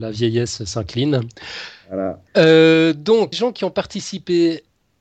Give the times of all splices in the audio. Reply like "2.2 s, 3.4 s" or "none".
2.3 s, 3.3 s